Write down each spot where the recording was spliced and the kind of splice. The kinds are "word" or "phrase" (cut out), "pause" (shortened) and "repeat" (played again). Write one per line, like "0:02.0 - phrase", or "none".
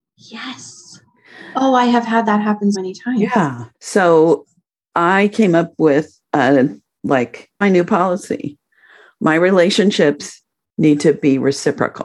0:02.7 - word
0:03.7 - pause
0:06.2 - pause
0:07.6 - phrase